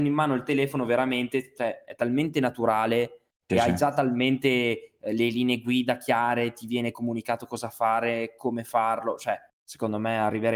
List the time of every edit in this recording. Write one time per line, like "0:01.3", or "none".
0:09.5